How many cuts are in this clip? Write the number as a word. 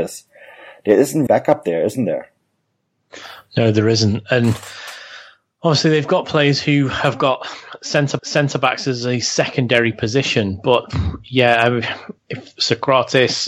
three